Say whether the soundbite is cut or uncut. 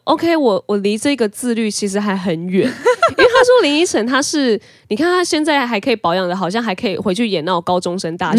uncut